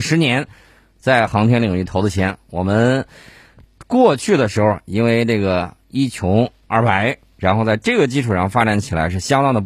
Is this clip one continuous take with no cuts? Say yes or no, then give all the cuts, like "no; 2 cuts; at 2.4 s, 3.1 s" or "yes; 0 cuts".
yes; 0 cuts